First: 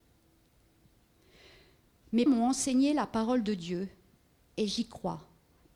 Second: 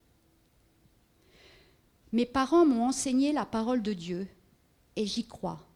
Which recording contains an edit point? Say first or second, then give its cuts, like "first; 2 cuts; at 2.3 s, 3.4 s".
first; 1 cut; at 2.3 s